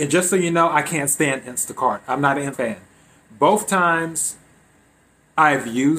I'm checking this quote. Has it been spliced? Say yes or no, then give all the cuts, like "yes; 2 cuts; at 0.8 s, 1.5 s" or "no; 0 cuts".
yes; 1 cut; at 2.5 s